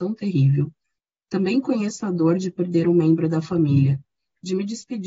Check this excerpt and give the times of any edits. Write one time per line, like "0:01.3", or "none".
none